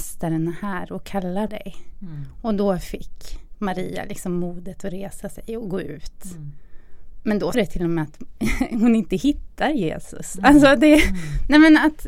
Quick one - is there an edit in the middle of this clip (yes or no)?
yes